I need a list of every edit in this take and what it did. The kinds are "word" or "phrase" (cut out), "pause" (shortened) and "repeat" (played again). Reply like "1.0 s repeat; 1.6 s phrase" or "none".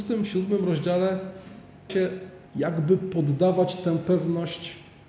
1.9 s word; 2.5 s pause